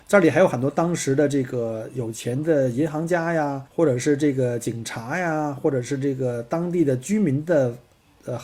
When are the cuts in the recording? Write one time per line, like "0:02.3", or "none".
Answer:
0:03.7